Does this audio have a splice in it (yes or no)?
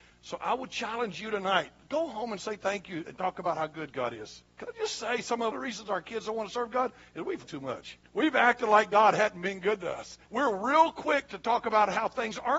yes